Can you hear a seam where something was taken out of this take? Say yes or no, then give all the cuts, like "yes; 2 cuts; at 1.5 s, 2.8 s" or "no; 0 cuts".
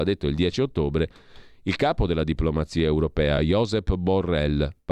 no; 0 cuts